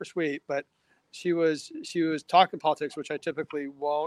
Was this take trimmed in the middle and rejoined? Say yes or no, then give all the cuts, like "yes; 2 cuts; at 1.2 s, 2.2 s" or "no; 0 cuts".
no; 0 cuts